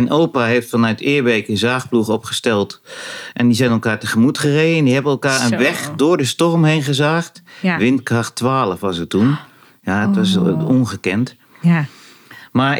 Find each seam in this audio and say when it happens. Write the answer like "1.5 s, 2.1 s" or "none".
none